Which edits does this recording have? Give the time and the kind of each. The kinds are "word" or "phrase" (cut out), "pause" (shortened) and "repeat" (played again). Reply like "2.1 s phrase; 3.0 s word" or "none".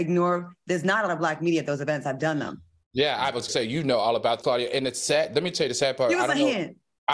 1.1 s word; 3.5 s word; 4.4 s word